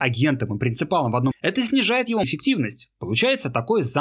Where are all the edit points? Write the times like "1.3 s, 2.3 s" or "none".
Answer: 1.3 s, 2.2 s